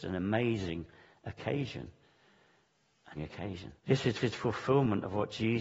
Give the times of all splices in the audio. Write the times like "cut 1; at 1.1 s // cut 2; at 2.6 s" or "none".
cut 1; at 3.1 s // cut 2; at 3.8 s // cut 3; at 4.2 s